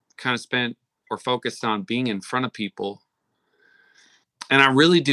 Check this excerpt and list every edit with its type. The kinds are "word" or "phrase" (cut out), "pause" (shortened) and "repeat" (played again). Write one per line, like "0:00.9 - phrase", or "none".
none